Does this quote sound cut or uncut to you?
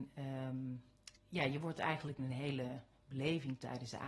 cut